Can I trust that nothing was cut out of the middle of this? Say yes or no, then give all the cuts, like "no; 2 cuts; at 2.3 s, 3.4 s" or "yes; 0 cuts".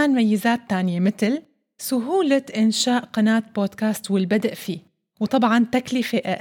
yes; 0 cuts